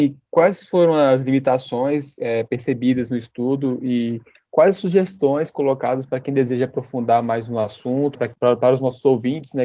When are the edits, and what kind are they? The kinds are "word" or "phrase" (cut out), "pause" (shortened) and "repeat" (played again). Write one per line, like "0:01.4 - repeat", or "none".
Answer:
0:08.1 - word